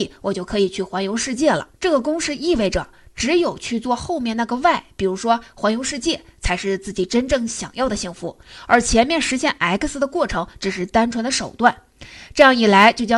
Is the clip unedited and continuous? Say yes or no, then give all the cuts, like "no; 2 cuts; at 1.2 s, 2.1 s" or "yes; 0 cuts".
no; 1 cut; at 1.8 s